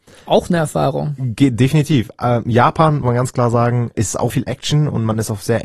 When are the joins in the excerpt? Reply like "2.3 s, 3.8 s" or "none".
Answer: 3.0 s, 3.9 s, 4.3 s